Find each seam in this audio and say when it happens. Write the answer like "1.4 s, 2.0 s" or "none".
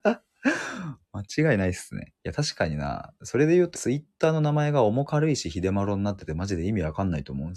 2.2 s, 3.7 s

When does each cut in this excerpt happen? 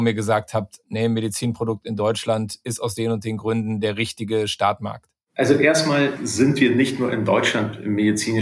6.2 s

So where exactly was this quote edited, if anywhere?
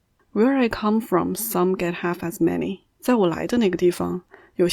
2.9 s

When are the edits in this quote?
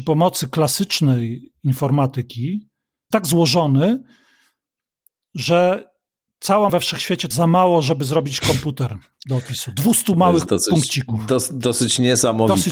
3.1 s, 6.7 s, 7.3 s, 10.5 s

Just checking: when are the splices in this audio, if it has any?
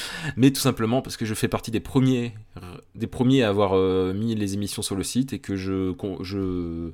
none

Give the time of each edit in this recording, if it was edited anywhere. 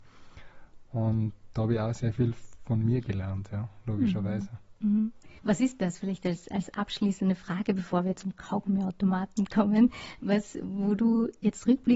5.4 s

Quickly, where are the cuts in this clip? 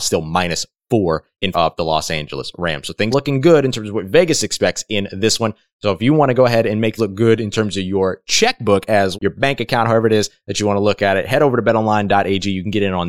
1.5 s, 3.1 s, 7.0 s, 9.1 s

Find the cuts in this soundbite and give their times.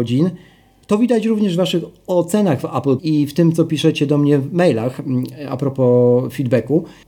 3.0 s

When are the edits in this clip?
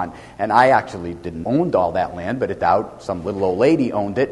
1.4 s, 2.6 s

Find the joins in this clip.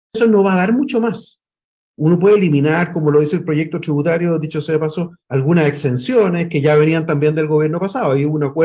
5.2 s

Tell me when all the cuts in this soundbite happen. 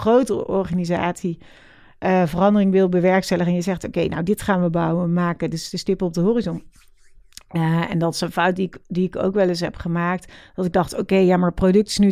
none

